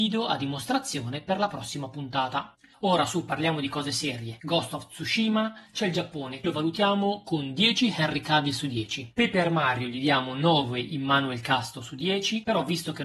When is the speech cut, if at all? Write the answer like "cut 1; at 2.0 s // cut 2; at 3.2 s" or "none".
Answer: cut 1; at 6.4 s